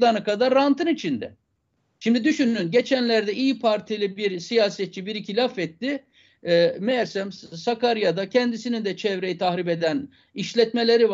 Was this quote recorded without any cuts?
yes; 0 cuts

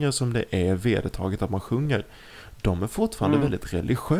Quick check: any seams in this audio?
no; 0 cuts

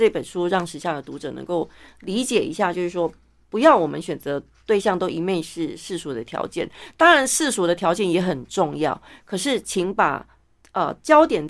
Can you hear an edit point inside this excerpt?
no; 0 cuts

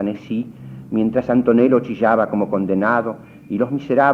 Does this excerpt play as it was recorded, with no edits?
yes; 0 cuts

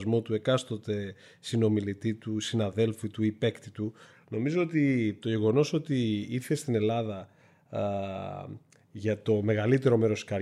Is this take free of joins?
yes; 0 cuts

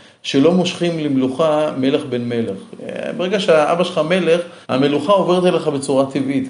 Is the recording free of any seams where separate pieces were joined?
no; 1 cut; at 4.6 s

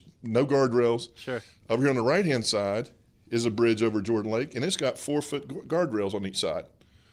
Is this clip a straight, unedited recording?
yes; 0 cuts

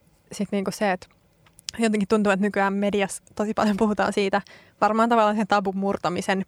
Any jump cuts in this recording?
no; 0 cuts

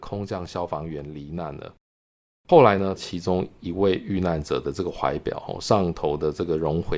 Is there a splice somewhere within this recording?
no; 0 cuts

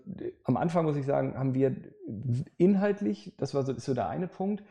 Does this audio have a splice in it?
no; 0 cuts

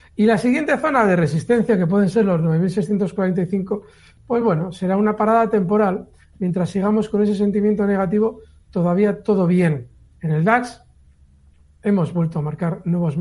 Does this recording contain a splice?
no; 0 cuts

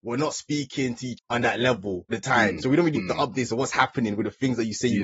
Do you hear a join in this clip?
yes; 3 cuts; at 1.2 s, 2.1 s, 3.0 s

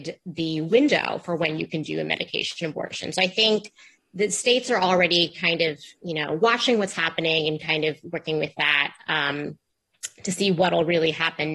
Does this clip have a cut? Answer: no; 0 cuts

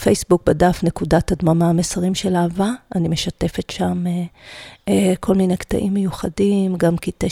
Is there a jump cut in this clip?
no; 0 cuts

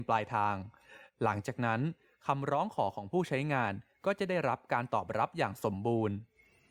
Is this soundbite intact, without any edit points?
yes; 0 cuts

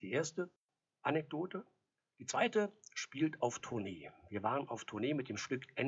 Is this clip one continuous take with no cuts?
yes; 0 cuts

